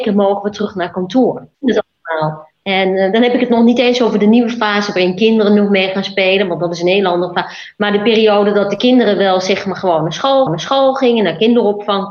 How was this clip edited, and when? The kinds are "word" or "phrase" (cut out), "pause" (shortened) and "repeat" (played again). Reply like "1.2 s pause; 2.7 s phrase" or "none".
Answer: 1.5 s pause; 2.5 s pause; 10.5 s repeat